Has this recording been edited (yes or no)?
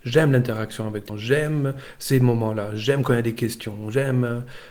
yes